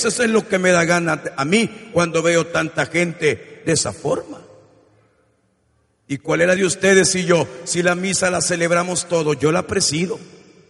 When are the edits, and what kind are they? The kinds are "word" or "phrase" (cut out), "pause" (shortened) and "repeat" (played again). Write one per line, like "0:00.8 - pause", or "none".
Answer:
0:06.6 - word